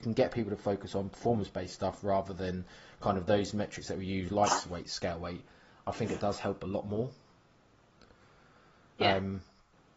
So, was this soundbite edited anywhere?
no; 0 cuts

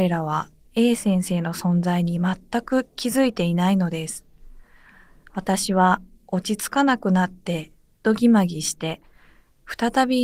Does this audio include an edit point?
no; 0 cuts

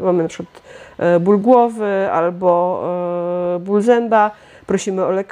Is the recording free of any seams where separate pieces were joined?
yes; 0 cuts

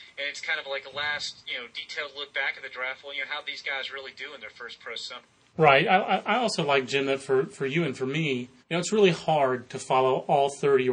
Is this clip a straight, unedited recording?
no; 1 cut; at 8.6 s

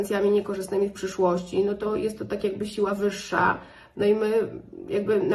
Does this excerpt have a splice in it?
no; 0 cuts

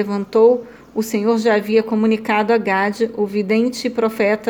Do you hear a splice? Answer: no; 0 cuts

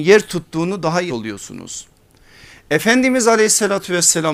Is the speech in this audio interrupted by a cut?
yes; 1 cut; at 1.1 s

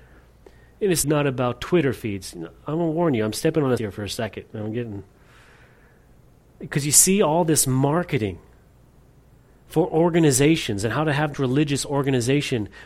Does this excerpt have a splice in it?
yes; 3 cuts; at 1.0 s, 3.8 s, 11.3 s

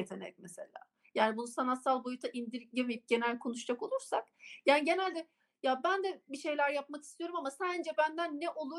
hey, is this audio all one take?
yes; 0 cuts

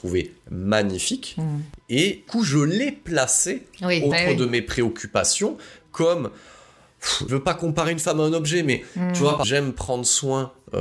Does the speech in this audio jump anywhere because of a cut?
yes; 4 cuts; at 2.3 s, 4.1 s, 7.3 s, 9.4 s

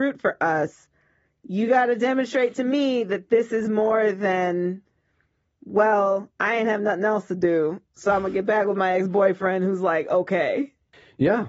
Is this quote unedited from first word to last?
yes; 0 cuts

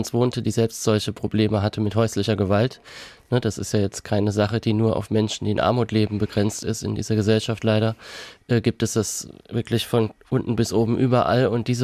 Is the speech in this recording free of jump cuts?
yes; 0 cuts

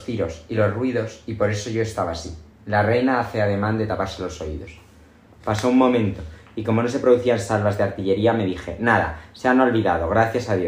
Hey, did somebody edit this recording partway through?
no; 0 cuts

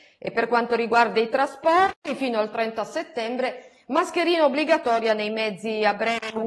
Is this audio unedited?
yes; 0 cuts

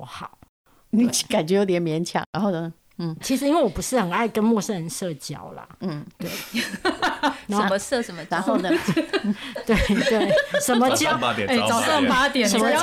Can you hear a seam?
yes; 1 cut; at 3.2 s

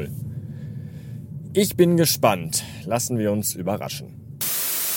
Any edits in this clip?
no; 0 cuts

